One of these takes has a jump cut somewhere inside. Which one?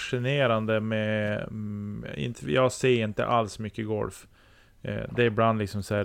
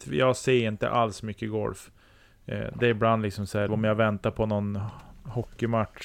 second; 1 cut; at 3.7 s

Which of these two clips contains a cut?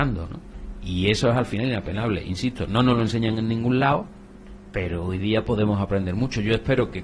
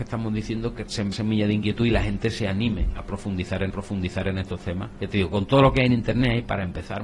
second; 2 cuts; at 1.1 s, 3.7 s

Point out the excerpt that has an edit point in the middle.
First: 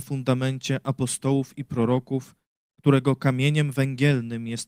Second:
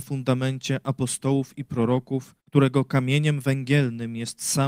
second; 1 cut; at 2.4 s

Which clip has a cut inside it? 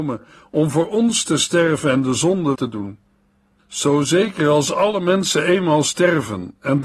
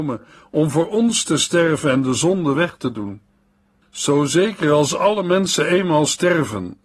first; 1 cut; at 2.5 s

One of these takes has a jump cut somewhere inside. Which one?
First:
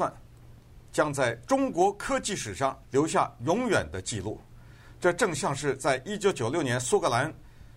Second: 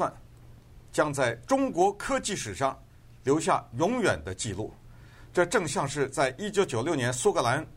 first; 1 cut; at 2.8 s

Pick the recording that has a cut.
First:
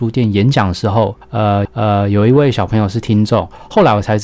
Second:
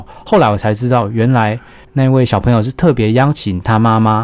first; 1 cut; at 1.6 s

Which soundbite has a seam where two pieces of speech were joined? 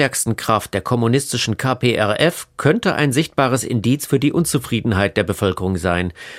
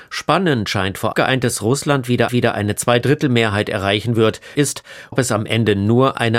second; 4 cuts; at 1.1 s, 2.3 s, 4.5 s, 5.1 s

